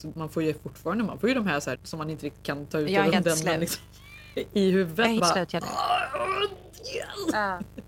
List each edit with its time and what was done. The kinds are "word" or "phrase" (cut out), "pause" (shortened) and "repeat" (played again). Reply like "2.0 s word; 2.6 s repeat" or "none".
1.7 s word; 3.1 s word; 5.2 s word